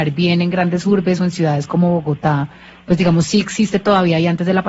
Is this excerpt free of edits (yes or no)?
yes